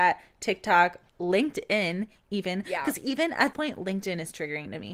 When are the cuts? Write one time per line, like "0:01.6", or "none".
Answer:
0:01.1
0:03.5